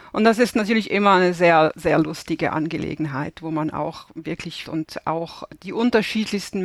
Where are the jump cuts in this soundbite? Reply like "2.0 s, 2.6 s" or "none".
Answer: 4.7 s